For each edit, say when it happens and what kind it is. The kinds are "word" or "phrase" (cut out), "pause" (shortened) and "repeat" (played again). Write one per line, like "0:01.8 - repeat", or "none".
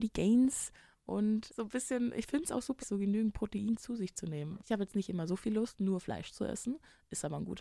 0:01.5 - word
0:02.8 - word
0:04.6 - word